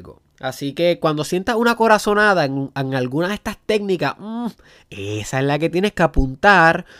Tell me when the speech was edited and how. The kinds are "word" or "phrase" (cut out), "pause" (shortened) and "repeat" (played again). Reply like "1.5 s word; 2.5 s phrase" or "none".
none

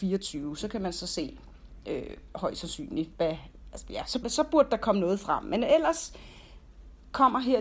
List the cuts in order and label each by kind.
4.2 s word

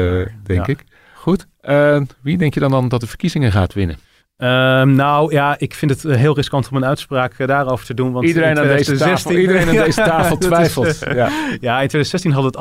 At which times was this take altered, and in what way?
none

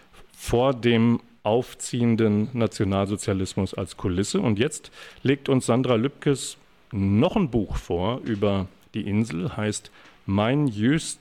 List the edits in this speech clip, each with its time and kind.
none

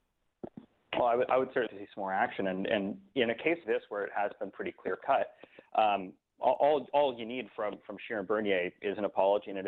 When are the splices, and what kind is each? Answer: 1.7 s word; 3.6 s word

